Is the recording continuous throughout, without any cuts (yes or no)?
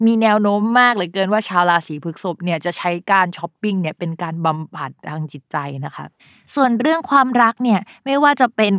yes